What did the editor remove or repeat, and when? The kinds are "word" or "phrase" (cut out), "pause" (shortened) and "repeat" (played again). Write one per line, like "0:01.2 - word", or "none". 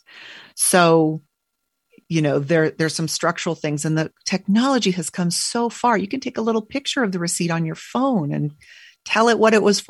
none